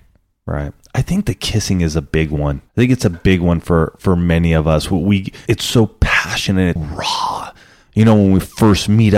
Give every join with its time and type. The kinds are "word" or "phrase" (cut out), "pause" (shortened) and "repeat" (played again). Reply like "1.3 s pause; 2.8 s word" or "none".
2.7 s pause; 5.5 s word; 6.8 s word